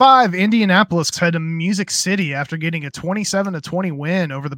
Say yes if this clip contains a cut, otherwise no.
yes